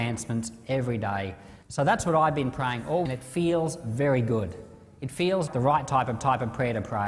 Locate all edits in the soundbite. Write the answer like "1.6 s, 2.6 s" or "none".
1.6 s, 3.0 s, 5.5 s, 6.2 s